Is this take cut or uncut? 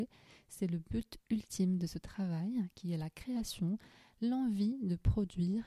uncut